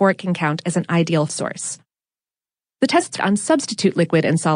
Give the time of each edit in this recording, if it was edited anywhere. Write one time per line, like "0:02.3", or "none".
0:01.3
0:03.2